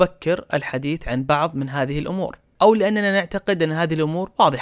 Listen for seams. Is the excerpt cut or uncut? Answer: uncut